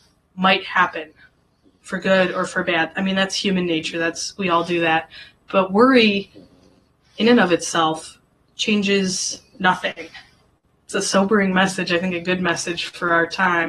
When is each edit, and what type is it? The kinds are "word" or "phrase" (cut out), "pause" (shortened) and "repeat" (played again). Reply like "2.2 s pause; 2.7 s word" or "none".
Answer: none